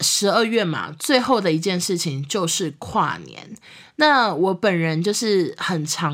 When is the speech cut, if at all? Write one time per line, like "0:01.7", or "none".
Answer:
none